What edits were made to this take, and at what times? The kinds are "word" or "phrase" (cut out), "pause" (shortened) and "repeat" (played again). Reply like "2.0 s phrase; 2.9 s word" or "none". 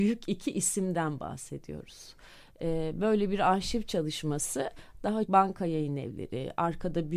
5.3 s word